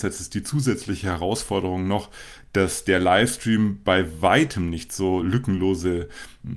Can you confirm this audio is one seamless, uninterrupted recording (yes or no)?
yes